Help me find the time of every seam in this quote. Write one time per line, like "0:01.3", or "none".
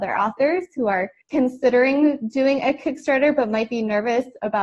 0:01.2